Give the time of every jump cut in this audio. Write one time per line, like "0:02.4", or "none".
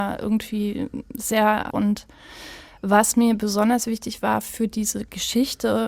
0:01.7